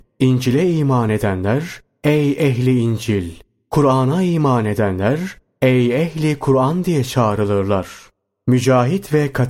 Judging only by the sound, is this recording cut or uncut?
uncut